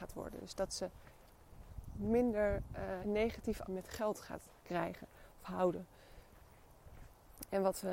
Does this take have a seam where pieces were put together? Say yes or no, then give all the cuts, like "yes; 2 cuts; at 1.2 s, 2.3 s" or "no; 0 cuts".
yes; 3 cuts; at 3.0 s, 3.7 s, 4.6 s